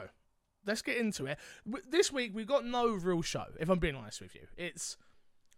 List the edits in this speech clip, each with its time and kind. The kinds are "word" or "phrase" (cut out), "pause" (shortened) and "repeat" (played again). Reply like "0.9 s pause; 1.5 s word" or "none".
none